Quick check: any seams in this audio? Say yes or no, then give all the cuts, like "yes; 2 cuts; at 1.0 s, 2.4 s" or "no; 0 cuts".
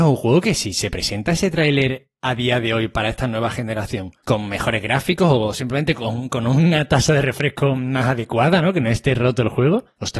no; 0 cuts